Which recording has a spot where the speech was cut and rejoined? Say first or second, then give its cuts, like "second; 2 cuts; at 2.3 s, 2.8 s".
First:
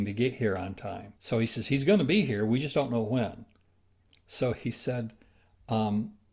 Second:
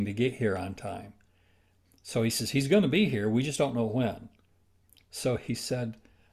first; 1 cut; at 1.2 s